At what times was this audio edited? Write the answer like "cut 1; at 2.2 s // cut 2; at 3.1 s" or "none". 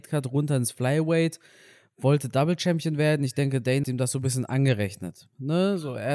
cut 1; at 3.8 s